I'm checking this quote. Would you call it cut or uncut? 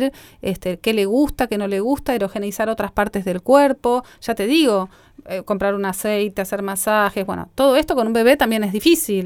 uncut